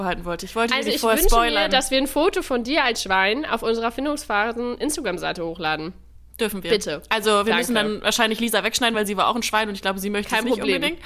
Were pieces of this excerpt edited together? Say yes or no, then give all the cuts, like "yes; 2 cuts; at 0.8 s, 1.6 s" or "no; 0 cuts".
no; 0 cuts